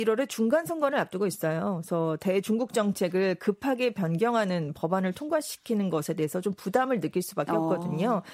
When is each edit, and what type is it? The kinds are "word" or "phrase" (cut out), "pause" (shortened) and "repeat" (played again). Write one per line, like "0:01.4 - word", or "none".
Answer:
none